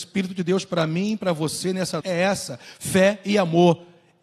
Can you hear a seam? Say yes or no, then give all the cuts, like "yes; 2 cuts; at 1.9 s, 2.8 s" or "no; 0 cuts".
yes; 1 cut; at 2.0 s